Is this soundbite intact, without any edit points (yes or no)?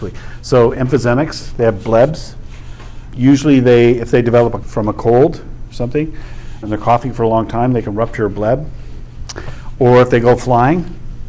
no